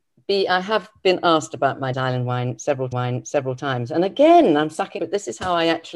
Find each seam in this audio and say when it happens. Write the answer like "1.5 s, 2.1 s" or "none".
1.9 s, 2.9 s, 5.0 s